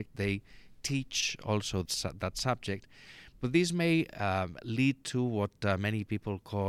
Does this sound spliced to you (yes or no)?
yes